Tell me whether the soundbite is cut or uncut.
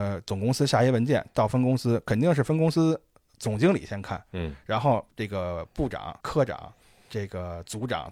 cut